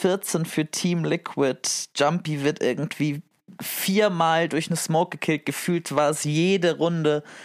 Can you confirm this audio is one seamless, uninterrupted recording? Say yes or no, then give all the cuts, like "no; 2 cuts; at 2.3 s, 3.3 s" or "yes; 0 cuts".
yes; 0 cuts